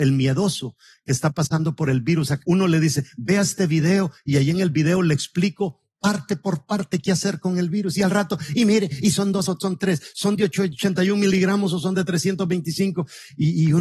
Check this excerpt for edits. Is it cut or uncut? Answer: cut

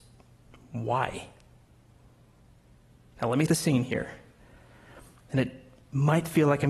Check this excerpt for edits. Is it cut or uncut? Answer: cut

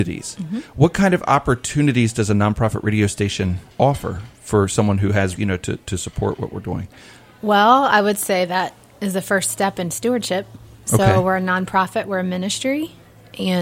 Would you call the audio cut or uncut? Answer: cut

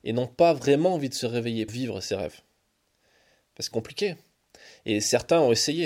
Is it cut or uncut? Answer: cut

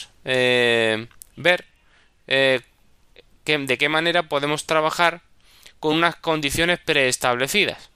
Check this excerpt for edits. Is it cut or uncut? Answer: uncut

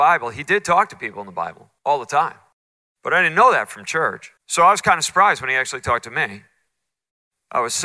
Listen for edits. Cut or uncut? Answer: cut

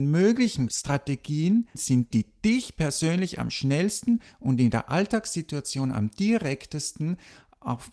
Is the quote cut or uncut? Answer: cut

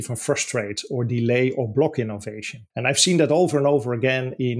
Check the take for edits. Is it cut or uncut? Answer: cut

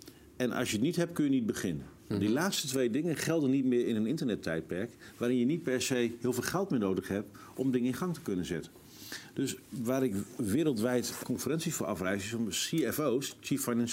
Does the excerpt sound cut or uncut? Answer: cut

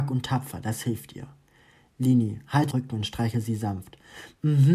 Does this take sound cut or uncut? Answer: cut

